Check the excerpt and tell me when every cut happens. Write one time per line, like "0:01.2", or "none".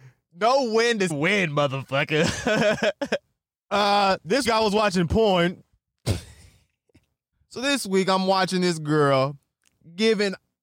0:01.1
0:04.4

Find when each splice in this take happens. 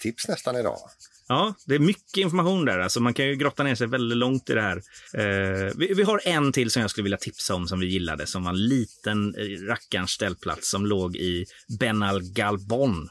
0:05.1

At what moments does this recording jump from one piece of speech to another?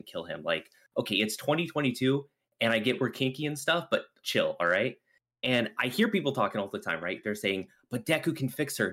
0:04.2

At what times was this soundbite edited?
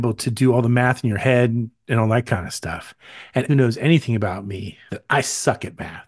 0:03.5
0:04.9

